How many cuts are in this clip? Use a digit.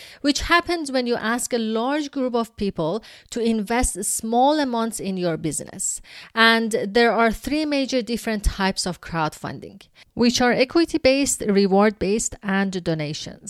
0